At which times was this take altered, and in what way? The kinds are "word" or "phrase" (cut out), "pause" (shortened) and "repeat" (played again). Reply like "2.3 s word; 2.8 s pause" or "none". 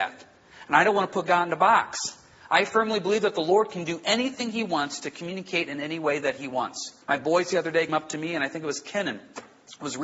7.0 s pause; 7.9 s word